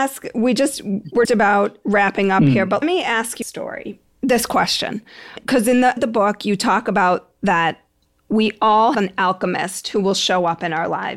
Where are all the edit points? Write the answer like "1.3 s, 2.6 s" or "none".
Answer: 1.2 s, 2.8 s, 3.4 s, 5.4 s, 6.0 s, 8.9 s